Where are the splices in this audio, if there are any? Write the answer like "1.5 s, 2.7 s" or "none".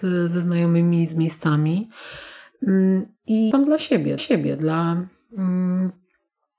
3.5 s, 4.2 s